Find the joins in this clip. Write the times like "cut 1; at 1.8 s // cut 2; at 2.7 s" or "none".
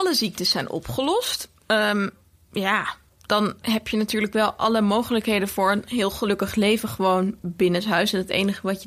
none